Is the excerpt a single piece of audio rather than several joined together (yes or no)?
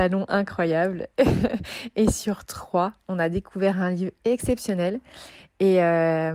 yes